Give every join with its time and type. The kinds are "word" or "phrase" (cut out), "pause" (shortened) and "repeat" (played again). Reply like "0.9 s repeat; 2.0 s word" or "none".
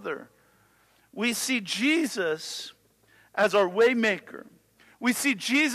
none